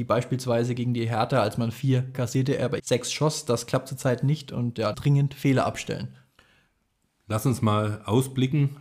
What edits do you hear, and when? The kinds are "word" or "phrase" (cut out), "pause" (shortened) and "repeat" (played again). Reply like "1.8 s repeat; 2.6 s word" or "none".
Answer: 2.1 s word; 2.8 s word; 4.9 s phrase